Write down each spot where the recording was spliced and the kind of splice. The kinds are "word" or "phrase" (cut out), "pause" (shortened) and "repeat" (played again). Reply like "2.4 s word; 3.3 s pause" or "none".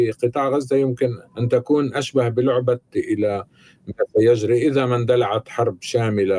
1.3 s pause; 2.9 s phrase

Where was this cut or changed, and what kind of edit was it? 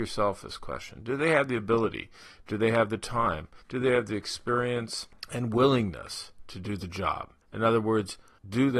3.6 s pause; 7.4 s pause

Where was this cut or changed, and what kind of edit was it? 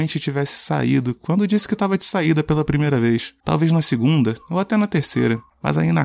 none

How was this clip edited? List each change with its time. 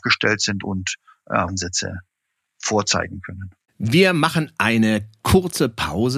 1.5 s word; 3.6 s pause

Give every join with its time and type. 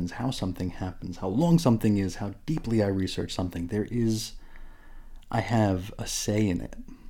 none

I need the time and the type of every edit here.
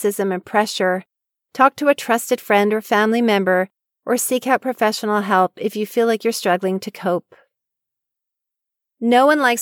none

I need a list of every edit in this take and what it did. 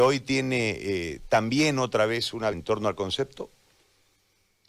2.5 s word

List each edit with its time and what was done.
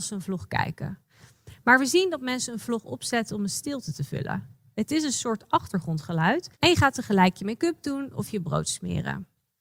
6.5 s pause

